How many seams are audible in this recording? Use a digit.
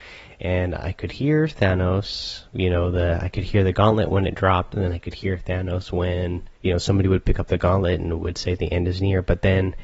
2